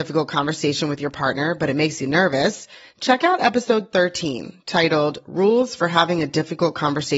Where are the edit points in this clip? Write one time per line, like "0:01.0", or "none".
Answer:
none